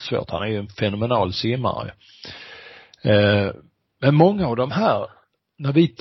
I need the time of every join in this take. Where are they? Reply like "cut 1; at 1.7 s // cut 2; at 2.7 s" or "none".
none